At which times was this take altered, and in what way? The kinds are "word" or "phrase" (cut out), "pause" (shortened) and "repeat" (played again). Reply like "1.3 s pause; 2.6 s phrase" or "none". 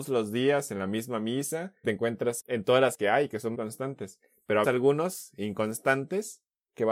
1.8 s word; 2.4 s word; 2.9 s word; 3.5 s word; 4.6 s word